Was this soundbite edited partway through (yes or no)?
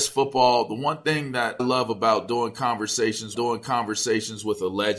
yes